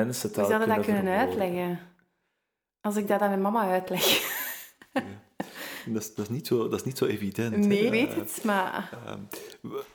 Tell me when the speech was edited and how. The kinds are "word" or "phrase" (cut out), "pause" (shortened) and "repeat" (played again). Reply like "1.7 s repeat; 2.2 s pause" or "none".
7.9 s word